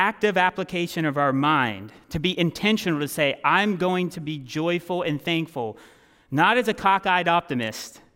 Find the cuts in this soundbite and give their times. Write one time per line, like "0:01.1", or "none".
none